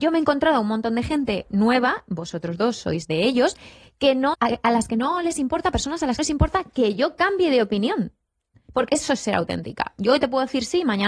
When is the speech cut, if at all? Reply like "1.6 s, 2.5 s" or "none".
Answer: 4.3 s, 6.2 s, 8.9 s